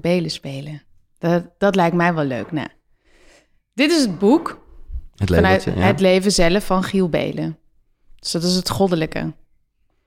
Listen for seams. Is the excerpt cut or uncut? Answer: cut